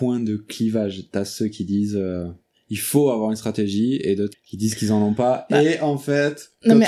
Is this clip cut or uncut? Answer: cut